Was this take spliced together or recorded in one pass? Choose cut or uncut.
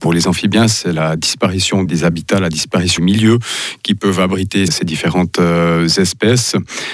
cut